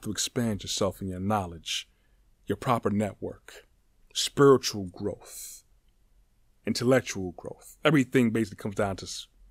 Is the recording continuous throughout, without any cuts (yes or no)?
yes